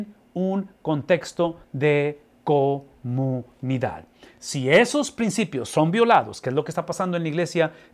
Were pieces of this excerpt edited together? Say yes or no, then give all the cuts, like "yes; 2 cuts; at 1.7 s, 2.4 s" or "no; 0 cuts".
no; 0 cuts